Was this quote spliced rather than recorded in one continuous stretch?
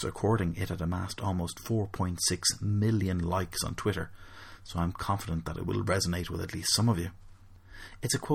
no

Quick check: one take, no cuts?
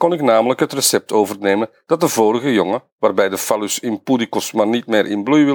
yes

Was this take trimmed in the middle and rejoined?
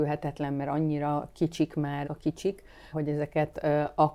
yes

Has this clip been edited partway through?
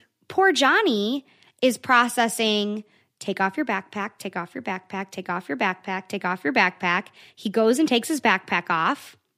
no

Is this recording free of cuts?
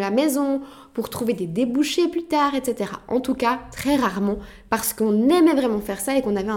yes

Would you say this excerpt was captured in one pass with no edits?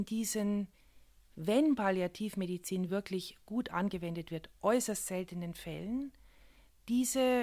yes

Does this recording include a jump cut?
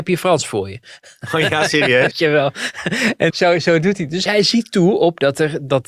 yes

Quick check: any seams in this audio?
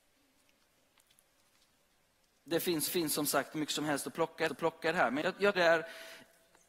yes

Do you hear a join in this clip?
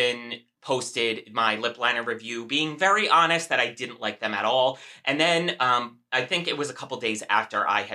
no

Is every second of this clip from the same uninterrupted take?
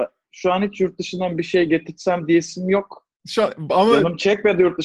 yes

